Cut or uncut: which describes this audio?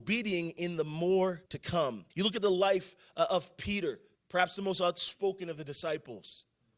cut